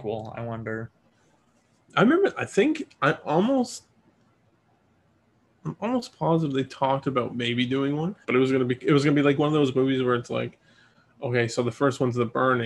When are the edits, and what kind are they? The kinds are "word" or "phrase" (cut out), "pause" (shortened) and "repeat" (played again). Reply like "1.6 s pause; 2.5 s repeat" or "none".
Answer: 8.2 s pause